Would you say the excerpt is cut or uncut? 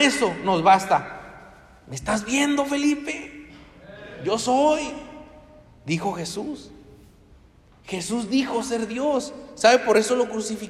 uncut